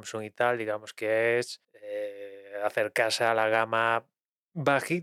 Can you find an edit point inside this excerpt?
yes; 1 cut; at 1.6 s

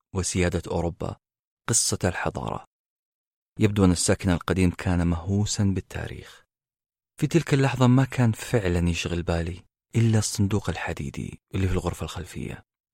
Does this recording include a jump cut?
no; 0 cuts

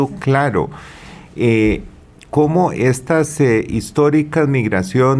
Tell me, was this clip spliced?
no; 0 cuts

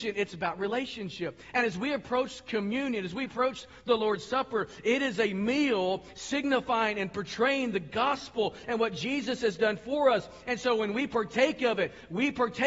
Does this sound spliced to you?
no; 0 cuts

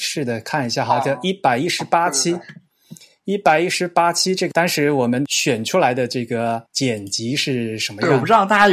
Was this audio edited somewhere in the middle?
no; 0 cuts

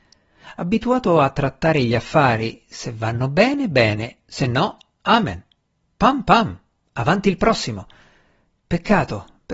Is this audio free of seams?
yes; 0 cuts

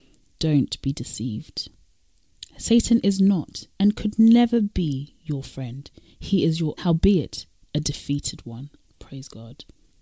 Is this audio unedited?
no; 2 cuts; at 3.7 s, 6.8 s

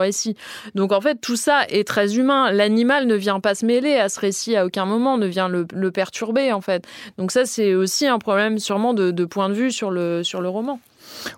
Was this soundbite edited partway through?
no; 0 cuts

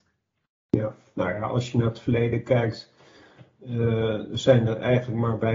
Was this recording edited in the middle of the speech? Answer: no; 0 cuts

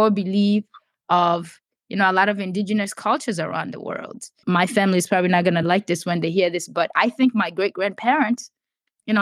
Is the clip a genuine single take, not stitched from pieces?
yes; 0 cuts

